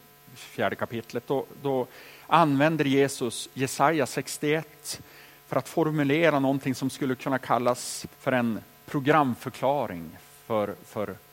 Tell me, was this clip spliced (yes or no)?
yes